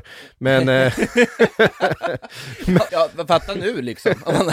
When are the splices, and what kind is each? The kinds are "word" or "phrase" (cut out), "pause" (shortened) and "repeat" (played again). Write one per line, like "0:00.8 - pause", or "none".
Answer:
0:02.9 - word